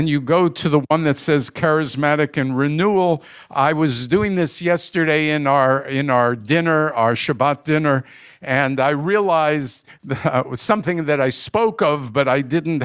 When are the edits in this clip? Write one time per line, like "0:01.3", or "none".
none